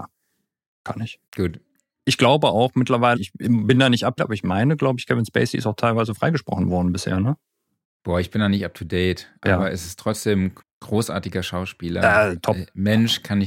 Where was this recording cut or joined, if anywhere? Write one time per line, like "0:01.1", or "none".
0:01.3
0:03.2
0:04.2
0:07.8
0:10.6

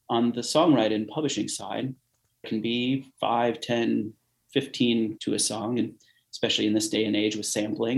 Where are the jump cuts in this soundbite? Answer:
0:02.4
0:05.2

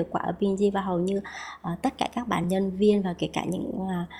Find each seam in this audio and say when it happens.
none

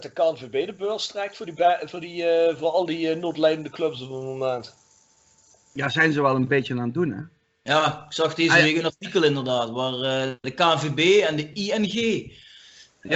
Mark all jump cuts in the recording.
none

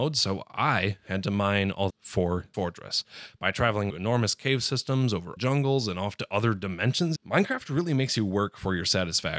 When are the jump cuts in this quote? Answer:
0:01.9
0:02.5
0:03.9
0:05.4
0:07.2

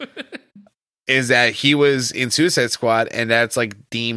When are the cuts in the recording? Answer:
none

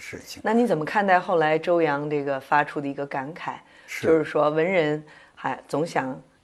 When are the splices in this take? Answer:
none

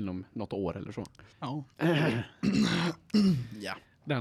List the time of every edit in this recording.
0:01.3

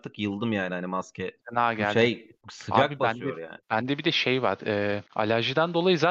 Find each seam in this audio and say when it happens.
0:01.4
0:02.4
0:03.6
0:05.1

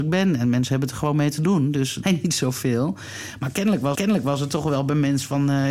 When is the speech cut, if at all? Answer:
0:02.0
0:03.9

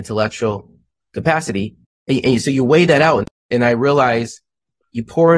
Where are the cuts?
none

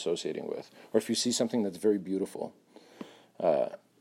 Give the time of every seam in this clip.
none

